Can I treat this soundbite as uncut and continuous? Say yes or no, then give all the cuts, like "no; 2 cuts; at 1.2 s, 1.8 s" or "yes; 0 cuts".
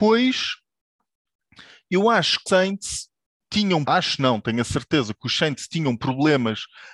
no; 2 cuts; at 2.5 s, 3.8 s